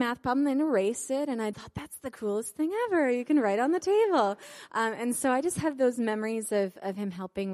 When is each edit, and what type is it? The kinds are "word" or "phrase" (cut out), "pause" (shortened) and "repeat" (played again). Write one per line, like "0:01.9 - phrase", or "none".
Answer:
0:01.5 - word